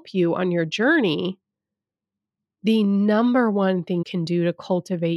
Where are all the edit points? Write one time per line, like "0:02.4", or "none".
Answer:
0:04.0